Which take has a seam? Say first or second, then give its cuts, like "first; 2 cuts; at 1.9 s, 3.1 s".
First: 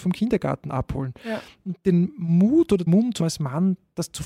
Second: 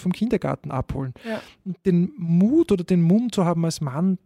first; 2 cuts; at 2.9 s, 3.2 s